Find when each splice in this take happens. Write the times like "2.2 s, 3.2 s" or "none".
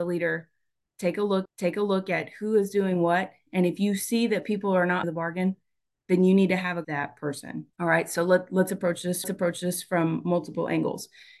1.5 s, 5.0 s, 6.8 s, 7.7 s, 9.2 s